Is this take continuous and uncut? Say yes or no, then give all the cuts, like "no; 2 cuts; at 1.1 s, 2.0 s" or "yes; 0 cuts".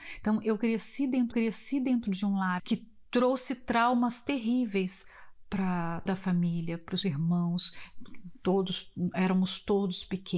no; 4 cuts; at 1.3 s, 2.6 s, 6.1 s, 7.0 s